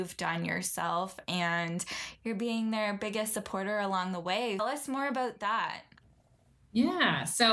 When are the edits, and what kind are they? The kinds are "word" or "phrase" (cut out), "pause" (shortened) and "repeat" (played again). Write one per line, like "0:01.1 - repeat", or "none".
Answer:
0:04.6 - phrase